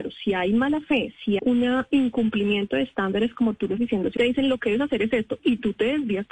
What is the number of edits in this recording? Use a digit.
3